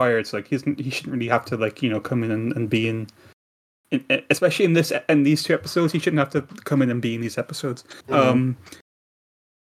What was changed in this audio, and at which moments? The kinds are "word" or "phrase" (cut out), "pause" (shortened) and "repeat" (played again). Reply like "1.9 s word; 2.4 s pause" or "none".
8.0 s pause